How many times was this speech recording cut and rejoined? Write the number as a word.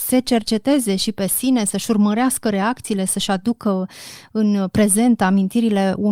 zero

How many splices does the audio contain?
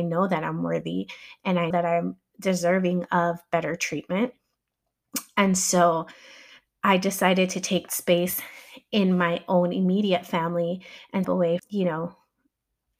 four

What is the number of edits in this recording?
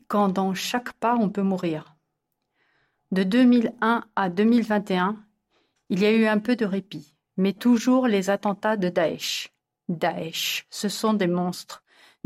one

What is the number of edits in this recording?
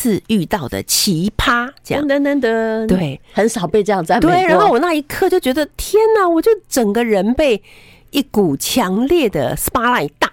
zero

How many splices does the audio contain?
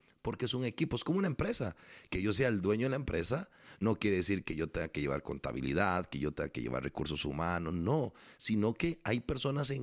zero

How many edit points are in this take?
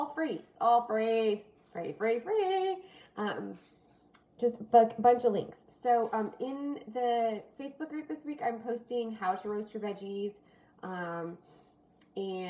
zero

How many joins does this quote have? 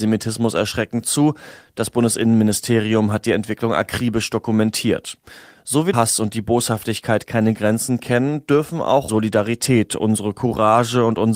two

